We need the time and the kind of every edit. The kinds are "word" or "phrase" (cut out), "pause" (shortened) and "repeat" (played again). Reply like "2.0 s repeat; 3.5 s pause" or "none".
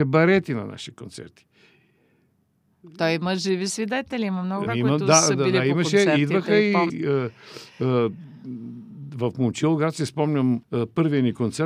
4.7 s word; 6.9 s word; 10.6 s pause

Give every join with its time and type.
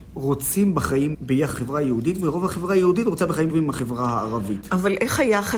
1.1 s word; 1.5 s word; 3.5 s word

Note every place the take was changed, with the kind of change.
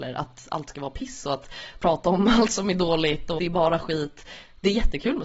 3.4 s word

